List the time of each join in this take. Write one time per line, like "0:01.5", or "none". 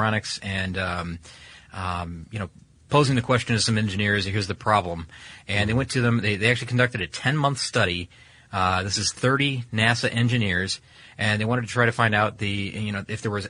none